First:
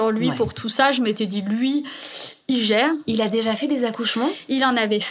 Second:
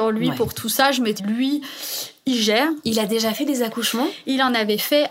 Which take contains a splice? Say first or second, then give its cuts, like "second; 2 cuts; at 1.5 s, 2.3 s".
second; 1 cut; at 1.2 s